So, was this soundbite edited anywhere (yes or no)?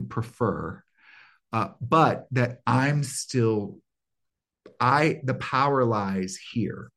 no